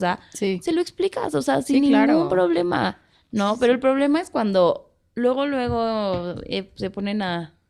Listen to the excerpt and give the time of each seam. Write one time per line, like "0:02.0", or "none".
none